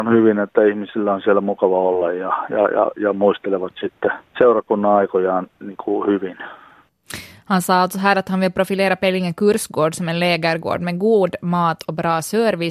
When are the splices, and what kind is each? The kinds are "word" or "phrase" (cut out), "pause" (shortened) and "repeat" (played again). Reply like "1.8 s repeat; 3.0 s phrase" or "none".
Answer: 4.3 s pause